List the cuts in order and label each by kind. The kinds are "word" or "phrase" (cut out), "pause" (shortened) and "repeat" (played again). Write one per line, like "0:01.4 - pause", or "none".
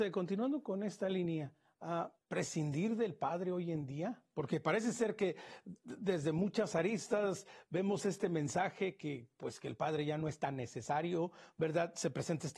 0:02.2 - phrase